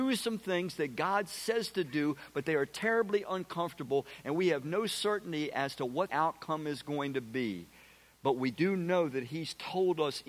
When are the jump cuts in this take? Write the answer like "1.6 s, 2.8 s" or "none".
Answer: 6.1 s